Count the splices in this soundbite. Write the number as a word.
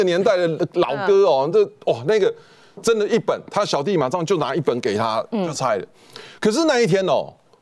zero